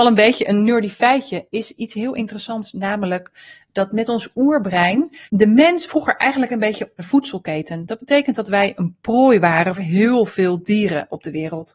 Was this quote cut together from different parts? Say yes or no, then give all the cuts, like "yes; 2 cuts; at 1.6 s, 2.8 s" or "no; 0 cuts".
yes; 4 cuts; at 5.3 s, 5.9 s, 7.0 s, 9.8 s